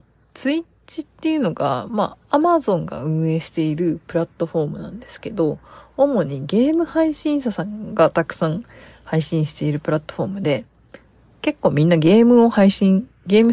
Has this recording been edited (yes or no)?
no